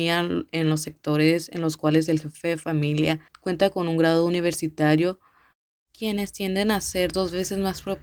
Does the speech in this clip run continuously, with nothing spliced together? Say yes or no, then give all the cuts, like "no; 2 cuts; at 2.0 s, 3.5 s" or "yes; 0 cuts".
no; 1 cut; at 3.3 s